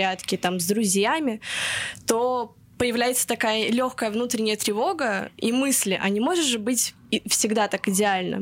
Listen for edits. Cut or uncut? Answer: uncut